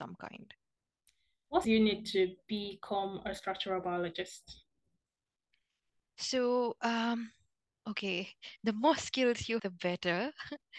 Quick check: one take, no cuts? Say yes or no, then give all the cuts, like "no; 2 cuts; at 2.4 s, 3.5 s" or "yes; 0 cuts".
no; 2 cuts; at 1.6 s, 9.6 s